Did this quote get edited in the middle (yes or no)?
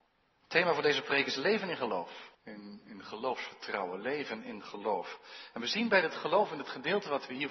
yes